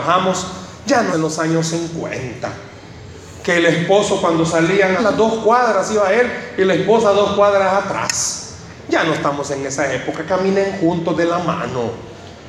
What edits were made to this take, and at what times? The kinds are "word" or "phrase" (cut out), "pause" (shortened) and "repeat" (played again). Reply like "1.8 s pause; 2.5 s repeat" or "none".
1.1 s word; 5.0 s word

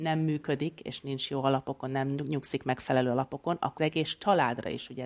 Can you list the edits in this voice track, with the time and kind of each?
3.8 s word

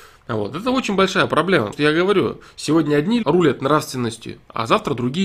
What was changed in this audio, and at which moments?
1.7 s word; 3.2 s word

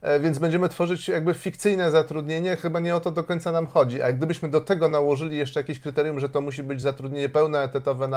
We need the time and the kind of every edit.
none

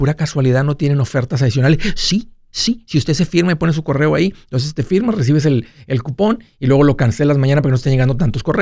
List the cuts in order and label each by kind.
none

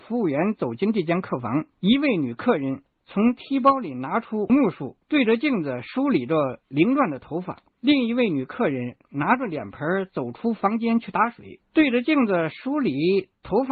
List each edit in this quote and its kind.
1.7 s pause; 5.0 s pause; 7.7 s pause

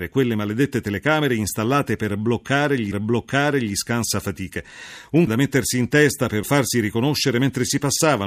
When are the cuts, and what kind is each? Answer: 2.9 s repeat; 5.3 s word; 6.4 s word

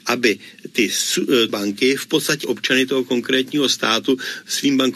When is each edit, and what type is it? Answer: 1.5 s phrase; 2.4 s word

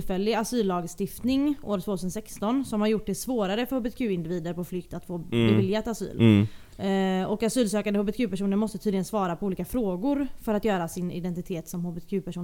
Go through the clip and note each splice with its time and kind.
none

